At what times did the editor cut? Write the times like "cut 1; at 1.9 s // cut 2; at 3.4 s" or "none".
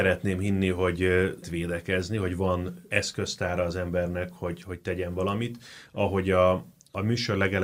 cut 1; at 1.4 s